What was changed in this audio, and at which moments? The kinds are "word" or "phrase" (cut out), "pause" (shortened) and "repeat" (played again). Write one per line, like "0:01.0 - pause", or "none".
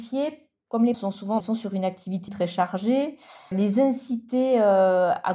0:00.9 - word
0:01.4 - word
0:02.3 - phrase
0:03.5 - word